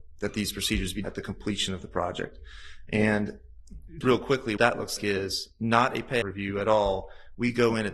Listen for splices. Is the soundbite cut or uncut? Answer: cut